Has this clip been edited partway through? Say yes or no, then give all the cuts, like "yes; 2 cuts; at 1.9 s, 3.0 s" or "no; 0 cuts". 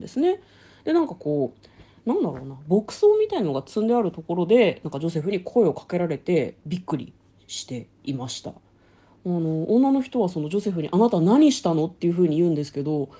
no; 0 cuts